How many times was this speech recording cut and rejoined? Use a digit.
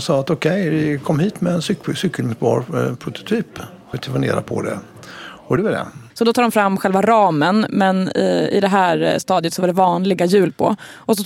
3